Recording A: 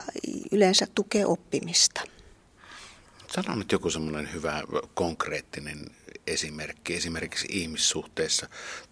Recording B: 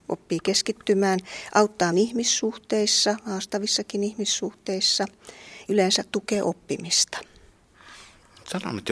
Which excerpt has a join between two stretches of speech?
B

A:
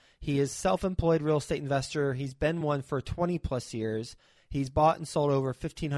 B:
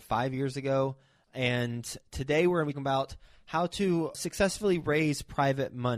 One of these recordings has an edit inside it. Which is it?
B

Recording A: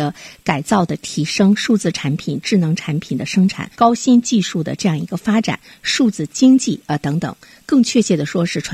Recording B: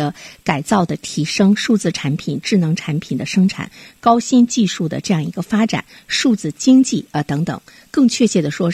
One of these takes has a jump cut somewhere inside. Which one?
A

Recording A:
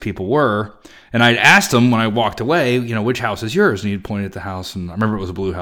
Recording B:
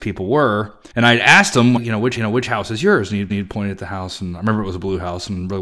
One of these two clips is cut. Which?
B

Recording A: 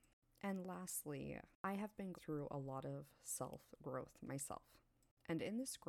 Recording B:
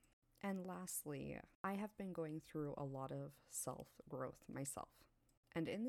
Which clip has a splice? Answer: A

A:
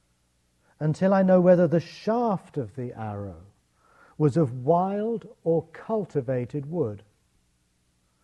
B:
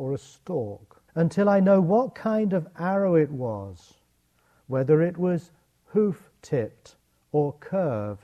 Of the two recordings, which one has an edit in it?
B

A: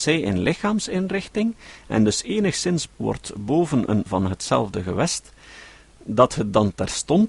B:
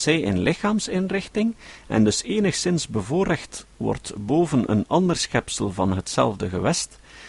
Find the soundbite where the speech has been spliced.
A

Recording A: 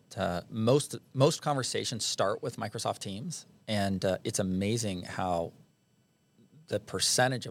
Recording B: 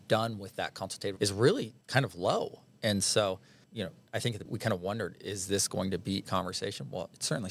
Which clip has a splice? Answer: B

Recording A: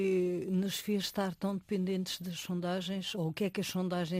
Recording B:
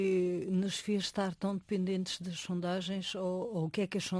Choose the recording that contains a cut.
A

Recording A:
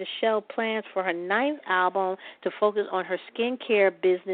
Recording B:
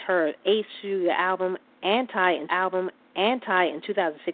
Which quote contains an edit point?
B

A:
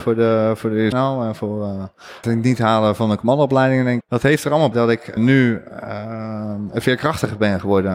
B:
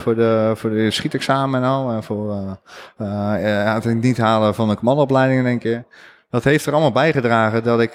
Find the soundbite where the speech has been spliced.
A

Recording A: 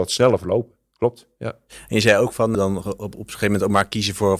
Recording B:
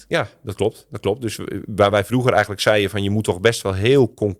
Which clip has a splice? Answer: A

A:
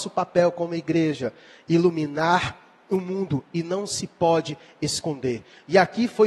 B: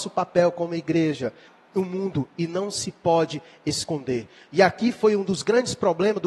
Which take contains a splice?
B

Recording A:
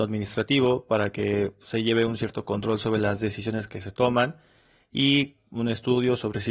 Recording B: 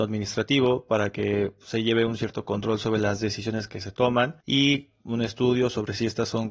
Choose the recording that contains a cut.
B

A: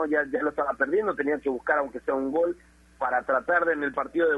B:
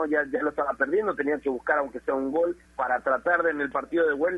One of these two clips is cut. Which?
B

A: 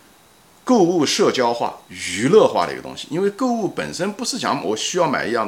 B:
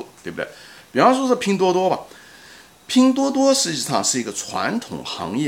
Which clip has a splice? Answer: A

